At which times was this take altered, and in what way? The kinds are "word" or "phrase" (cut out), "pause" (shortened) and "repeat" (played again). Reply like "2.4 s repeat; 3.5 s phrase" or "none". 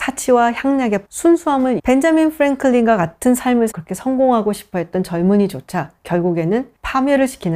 1.0 s word; 1.8 s word; 3.7 s word